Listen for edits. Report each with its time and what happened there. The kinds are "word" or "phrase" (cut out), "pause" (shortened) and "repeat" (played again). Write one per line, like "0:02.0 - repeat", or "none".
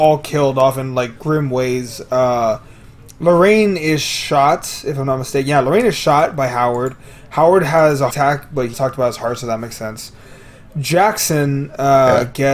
0:01.2 - pause
0:08.1 - word
0:08.7 - word